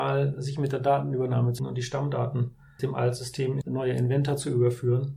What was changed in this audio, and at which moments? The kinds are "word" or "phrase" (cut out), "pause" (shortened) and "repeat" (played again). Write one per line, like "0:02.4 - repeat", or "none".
0:01.6 - word
0:02.8 - word
0:03.6 - word